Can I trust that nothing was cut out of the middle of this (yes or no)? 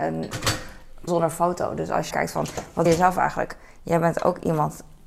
no